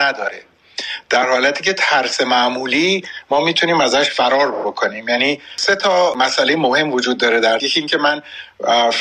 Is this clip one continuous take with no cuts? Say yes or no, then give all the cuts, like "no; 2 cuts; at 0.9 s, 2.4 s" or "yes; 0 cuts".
no; 1 cut; at 7.6 s